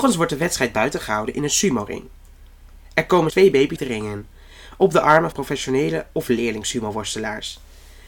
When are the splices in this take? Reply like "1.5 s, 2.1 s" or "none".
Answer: 3.3 s, 3.8 s, 5.3 s